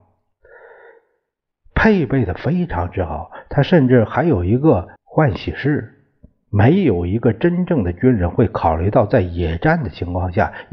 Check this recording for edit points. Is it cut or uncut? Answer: cut